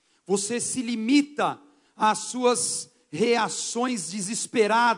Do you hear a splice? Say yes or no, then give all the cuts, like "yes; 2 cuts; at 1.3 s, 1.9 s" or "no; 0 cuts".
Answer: no; 0 cuts